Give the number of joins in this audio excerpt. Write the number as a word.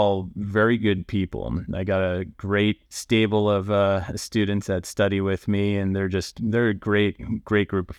one